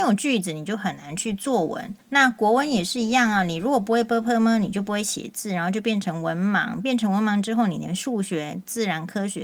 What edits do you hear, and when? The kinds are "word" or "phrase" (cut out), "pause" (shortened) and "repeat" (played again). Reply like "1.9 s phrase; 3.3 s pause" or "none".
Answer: 2.0 s pause